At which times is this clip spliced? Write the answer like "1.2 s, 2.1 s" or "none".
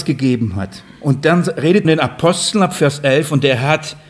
1.8 s

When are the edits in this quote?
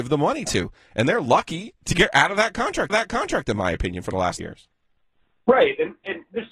2.9 s, 4.4 s

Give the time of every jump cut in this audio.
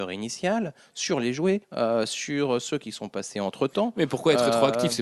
1.6 s

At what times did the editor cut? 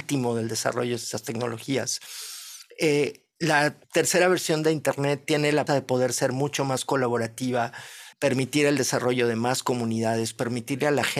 3.8 s, 5.7 s, 8.1 s

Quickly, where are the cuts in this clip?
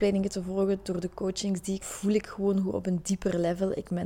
1.8 s

